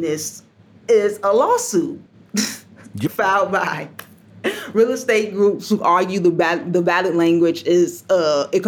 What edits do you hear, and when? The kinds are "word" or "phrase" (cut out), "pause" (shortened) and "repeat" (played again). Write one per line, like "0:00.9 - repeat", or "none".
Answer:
0:02.1 - pause

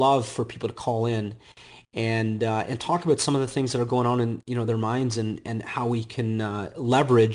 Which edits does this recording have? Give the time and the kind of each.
none

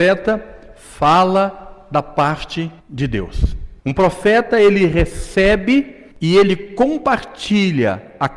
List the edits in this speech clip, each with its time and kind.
0:02.8 - pause
0:03.8 - pause
0:06.1 - pause

